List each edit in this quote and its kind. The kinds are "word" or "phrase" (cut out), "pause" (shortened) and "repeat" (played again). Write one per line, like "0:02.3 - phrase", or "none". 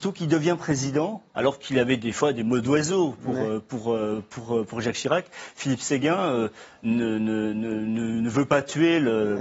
0:01.3 - pause

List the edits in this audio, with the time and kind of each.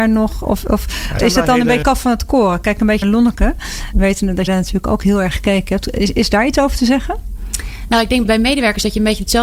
0:01.2 - word
0:01.8 - word
0:03.0 - word
0:03.9 - word
0:04.5 - word
0:05.3 - word
0:08.2 - word

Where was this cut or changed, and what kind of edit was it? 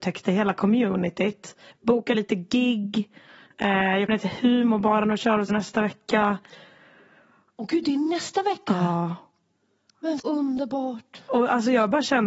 0:02.1 - word
0:04.1 - word
0:05.5 - word
0:10.2 - word

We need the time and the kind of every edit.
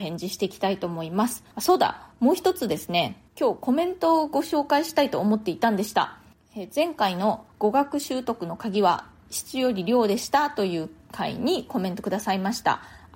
0:01.5 - pause
0:03.3 - pause
0:07.5 - pause

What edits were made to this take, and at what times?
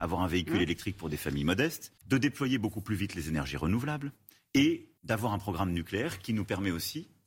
0:02.0 - pause
0:05.0 - pause

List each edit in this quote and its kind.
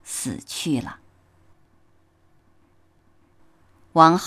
none

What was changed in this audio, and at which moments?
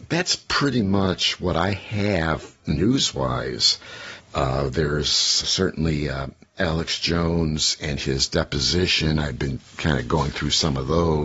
0:05.4 - word

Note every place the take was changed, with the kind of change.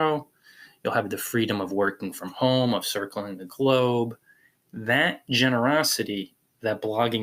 none

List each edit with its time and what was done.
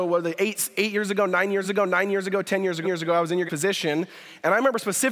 0:01.6 - repeat
0:02.8 - repeat
0:03.5 - word

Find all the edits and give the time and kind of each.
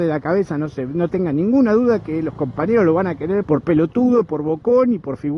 0:03.4 - word

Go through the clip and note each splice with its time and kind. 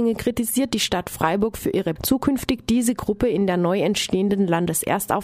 0:02.0 - word

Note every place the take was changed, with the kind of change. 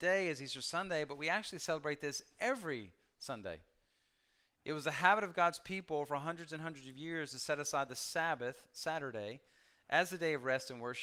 none

